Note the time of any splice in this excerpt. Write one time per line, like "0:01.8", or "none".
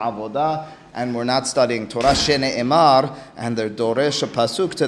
none